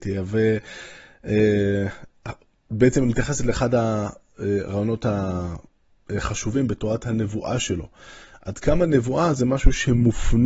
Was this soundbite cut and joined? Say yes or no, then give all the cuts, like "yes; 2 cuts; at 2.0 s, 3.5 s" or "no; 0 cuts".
no; 0 cuts